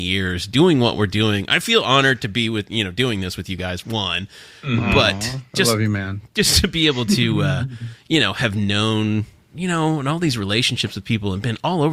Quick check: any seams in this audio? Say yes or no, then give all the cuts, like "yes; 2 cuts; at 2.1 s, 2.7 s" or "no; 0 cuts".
no; 0 cuts